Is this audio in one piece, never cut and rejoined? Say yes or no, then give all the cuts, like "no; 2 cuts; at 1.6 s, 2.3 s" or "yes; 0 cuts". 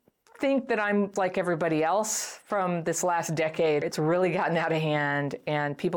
no; 2 cuts; at 1.2 s, 3.8 s